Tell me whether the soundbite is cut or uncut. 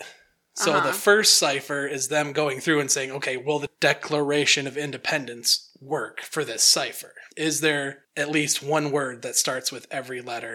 cut